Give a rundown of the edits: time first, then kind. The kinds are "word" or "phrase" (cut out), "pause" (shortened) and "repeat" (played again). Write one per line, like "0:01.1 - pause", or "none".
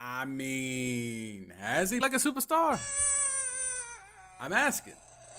0:02.0 - word

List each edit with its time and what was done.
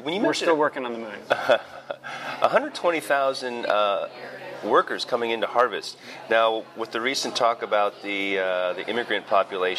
none

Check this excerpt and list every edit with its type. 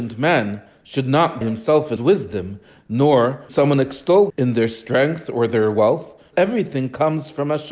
0:01.4 - word
0:02.0 - word
0:03.5 - word
0:04.3 - word
0:06.3 - word

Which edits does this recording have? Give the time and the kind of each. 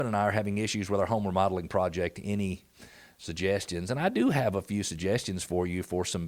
none

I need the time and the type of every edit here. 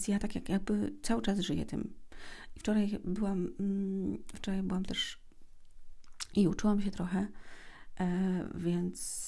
none

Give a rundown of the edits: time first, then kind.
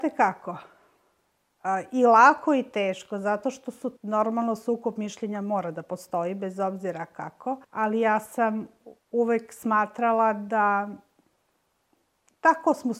0:04.0 - pause
0:07.6 - pause
0:09.0 - pause

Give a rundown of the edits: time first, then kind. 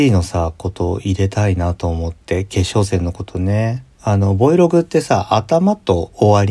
0:03.9 - pause

